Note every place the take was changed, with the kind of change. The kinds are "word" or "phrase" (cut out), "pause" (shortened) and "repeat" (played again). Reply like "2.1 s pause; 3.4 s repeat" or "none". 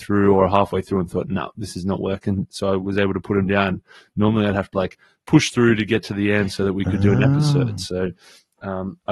none

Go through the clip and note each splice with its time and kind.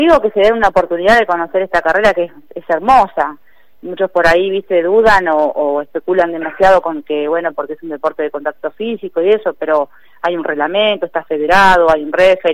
none

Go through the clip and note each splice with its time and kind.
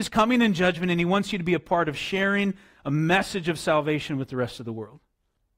none

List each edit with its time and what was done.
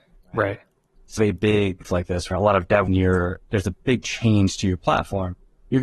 1.2 s phrase; 1.8 s word; 2.3 s word; 2.9 s phrase

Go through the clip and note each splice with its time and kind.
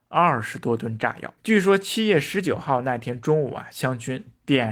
1.4 s pause

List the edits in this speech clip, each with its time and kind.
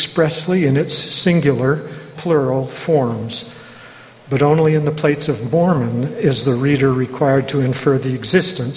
2.1 s word

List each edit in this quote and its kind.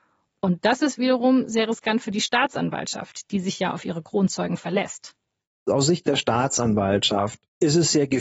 none

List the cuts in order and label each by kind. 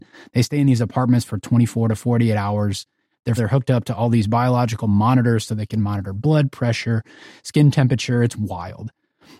3.4 s word

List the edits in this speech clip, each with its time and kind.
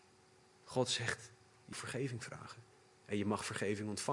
1.7 s word

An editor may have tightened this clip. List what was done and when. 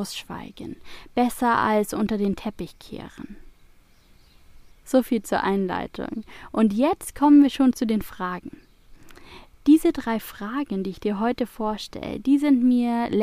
4.7 s pause

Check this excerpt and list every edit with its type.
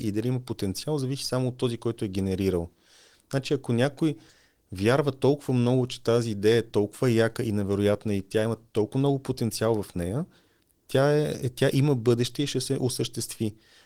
none

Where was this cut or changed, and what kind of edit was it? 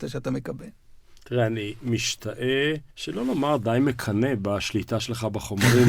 2.9 s pause

